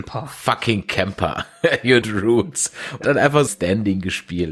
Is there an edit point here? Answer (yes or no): yes